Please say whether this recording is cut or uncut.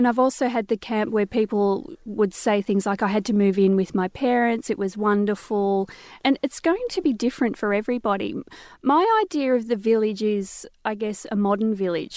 cut